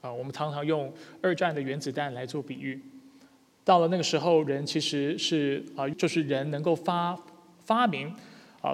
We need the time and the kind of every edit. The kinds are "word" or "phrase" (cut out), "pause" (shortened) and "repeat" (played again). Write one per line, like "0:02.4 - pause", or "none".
0:05.9 - word

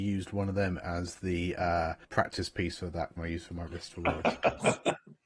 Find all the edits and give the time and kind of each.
0:02.0 - pause
0:03.2 - phrase
0:03.7 - word

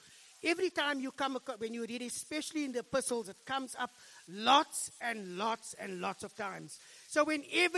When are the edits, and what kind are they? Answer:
none

